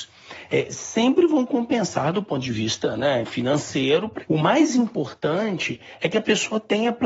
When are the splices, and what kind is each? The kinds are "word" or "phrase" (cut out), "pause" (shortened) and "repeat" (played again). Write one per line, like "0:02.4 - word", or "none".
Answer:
0:03.2 - word